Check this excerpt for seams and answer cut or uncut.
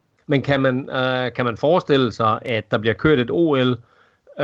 uncut